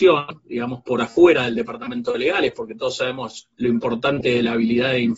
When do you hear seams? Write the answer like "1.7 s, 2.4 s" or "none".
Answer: 3.5 s